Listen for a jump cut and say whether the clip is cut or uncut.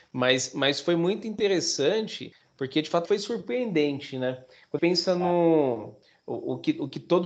cut